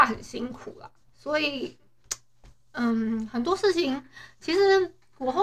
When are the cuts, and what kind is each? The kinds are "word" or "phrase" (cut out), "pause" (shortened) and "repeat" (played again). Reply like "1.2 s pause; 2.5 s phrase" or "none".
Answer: 1.0 s pause